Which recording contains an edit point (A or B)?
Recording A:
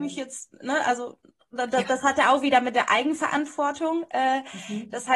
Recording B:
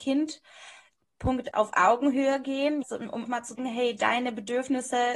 B